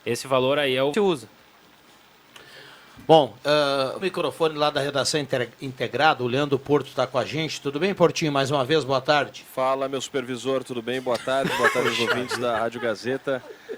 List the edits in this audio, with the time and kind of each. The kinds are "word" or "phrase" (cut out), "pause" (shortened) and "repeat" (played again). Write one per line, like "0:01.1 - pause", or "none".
0:00.9 - phrase
0:04.0 - phrase